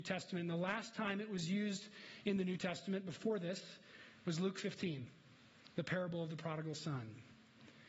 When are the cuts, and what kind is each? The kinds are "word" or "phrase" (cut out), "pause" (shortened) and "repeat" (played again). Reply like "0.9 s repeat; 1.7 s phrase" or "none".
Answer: none